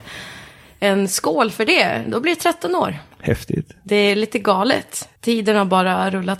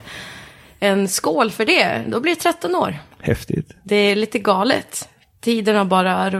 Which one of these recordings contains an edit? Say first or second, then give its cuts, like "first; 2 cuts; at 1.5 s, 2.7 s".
first; 1 cut; at 5.2 s